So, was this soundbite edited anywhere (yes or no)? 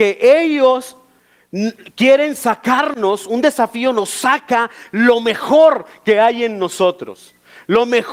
no